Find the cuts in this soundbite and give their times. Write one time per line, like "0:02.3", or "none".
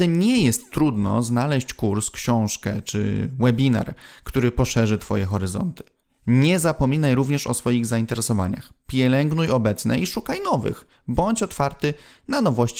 0:06.0